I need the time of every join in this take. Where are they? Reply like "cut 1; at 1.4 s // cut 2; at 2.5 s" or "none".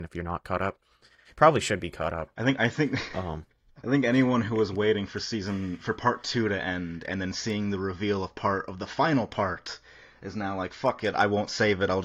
none